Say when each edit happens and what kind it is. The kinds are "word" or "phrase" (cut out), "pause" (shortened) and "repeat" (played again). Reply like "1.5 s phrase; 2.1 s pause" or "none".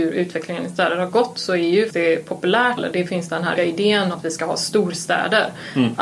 1.9 s word; 2.8 s word; 3.6 s word; 4.1 s word